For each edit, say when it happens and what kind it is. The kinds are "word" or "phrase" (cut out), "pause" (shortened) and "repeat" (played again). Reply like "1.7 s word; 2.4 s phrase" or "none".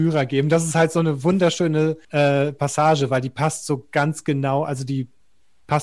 2.0 s pause